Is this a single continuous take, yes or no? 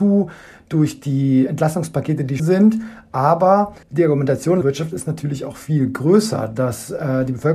no